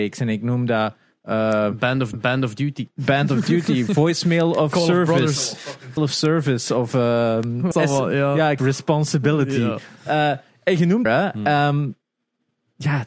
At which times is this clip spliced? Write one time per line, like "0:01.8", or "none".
0:02.1
0:06.0
0:07.7
0:08.6
0:11.1